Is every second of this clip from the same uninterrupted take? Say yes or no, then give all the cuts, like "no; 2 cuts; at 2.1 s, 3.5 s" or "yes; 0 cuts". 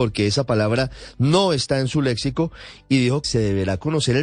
no; 1 cut; at 3.2 s